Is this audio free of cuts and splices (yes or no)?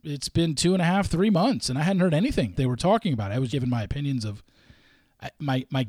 no